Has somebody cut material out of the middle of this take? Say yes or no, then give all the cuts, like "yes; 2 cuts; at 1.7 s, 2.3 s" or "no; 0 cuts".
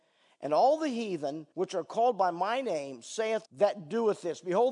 yes; 2 cuts; at 1.5 s, 3.4 s